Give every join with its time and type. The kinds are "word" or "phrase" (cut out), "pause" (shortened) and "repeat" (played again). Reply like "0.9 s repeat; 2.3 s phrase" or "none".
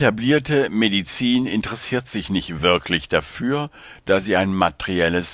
none